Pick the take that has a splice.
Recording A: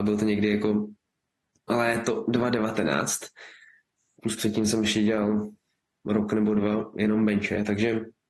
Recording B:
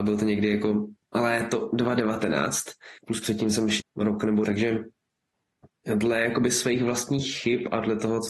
B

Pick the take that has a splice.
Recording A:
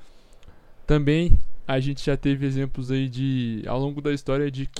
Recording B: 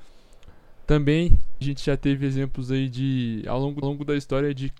B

